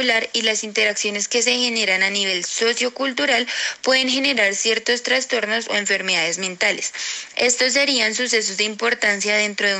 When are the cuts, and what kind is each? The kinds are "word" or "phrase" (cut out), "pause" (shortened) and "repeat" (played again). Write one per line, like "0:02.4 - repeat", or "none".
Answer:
none